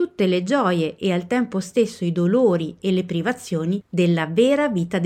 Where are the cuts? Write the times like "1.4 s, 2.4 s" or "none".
none